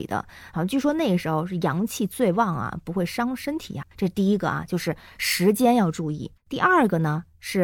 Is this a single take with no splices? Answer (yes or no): no